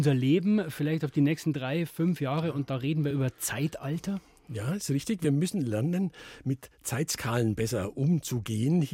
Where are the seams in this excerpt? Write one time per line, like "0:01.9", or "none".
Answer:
none